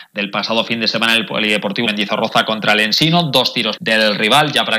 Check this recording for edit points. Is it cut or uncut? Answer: cut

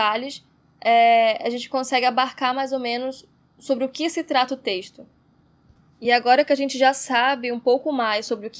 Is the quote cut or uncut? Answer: uncut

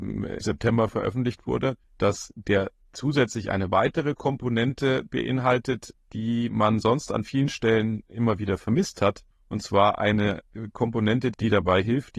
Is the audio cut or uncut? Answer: uncut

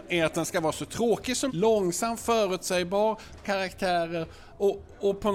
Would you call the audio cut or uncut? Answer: cut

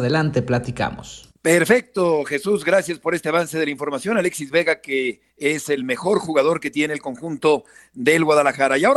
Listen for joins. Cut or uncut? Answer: cut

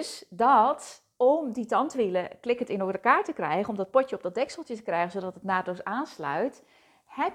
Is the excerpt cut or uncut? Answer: uncut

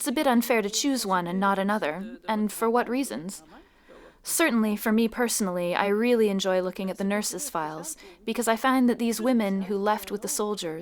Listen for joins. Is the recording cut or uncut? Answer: uncut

